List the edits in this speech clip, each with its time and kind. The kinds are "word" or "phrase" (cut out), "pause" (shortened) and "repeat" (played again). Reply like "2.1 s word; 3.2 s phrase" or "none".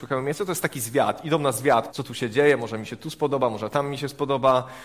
1.9 s word